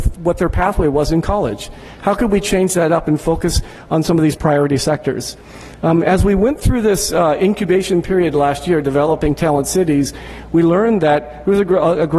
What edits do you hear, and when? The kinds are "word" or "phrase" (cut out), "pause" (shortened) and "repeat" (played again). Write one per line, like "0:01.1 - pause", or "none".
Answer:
none